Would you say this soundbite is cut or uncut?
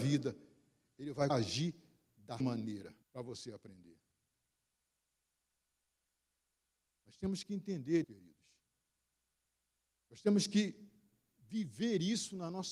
cut